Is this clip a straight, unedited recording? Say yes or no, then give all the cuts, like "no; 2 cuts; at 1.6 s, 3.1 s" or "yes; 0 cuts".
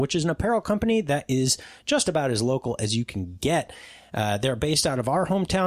yes; 0 cuts